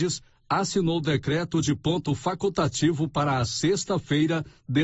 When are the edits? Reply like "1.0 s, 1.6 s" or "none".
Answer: none